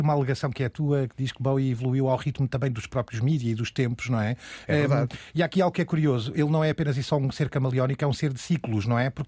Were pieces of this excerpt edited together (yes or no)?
no